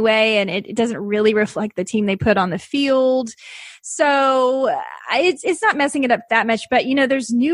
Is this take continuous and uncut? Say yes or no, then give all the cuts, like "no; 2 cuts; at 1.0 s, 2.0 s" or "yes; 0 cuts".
yes; 0 cuts